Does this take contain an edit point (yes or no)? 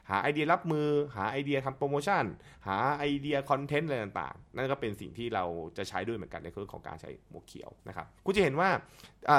yes